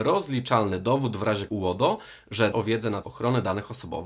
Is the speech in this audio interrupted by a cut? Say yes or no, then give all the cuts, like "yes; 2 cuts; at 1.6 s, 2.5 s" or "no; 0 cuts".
yes; 3 cuts; at 1.5 s, 2.5 s, 3.0 s